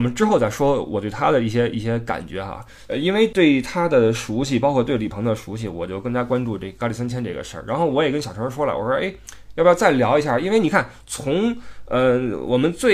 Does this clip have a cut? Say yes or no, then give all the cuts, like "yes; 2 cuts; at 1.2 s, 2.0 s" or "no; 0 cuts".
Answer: yes; 1 cut; at 2.9 s